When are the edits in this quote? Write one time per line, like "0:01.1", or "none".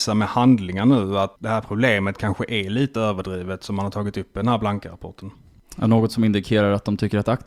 none